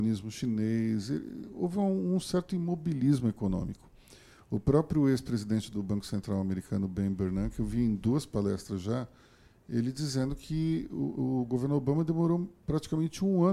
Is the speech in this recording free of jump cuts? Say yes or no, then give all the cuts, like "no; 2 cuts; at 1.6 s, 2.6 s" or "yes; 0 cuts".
yes; 0 cuts